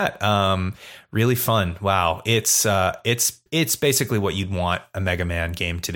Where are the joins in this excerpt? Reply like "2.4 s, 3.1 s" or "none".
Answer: 3.5 s